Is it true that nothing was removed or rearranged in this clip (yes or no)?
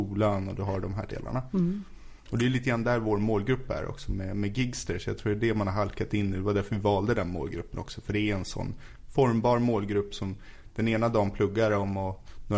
yes